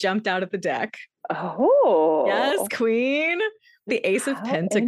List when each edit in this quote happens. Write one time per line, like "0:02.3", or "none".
0:03.9

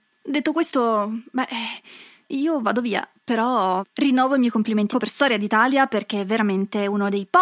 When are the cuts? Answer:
0:02.2
0:04.9

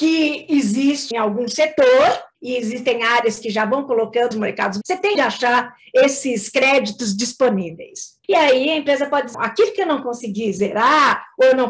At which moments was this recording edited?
0:01.1
0:02.3
0:04.3
0:04.8
0:05.1
0:08.2
0:09.3

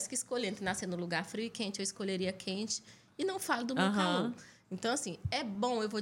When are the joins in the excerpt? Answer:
none

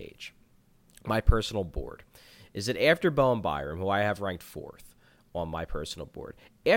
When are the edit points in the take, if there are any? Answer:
none

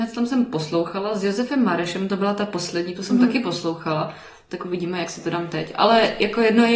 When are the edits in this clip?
none

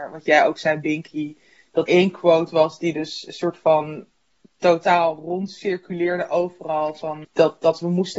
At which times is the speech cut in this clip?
0:01.9
0:07.2

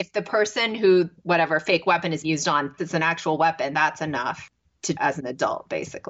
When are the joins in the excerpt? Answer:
0:01.1
0:02.2
0:02.8
0:03.7
0:04.9

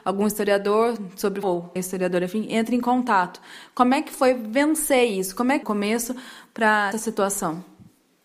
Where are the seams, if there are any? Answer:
0:01.4
0:01.8
0:05.6
0:06.9

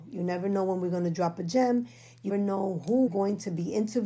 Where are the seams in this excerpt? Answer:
0:02.3
0:03.1

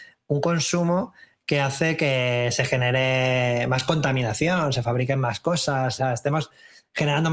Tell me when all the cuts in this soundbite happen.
0:06.0

